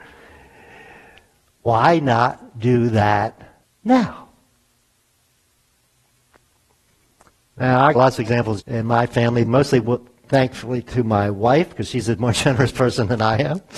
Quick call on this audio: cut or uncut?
cut